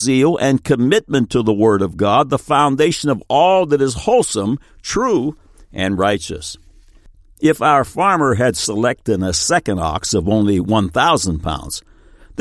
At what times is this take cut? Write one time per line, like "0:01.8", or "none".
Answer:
none